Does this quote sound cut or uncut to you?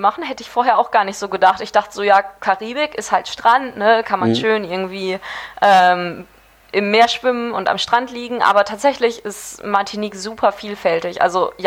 uncut